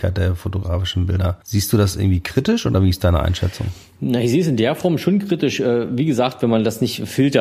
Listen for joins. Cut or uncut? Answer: cut